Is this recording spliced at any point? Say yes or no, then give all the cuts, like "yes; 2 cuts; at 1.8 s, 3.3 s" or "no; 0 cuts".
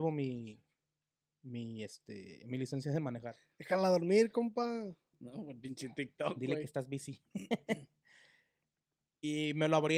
no; 0 cuts